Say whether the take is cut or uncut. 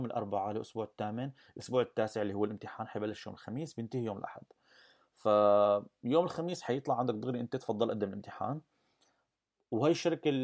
uncut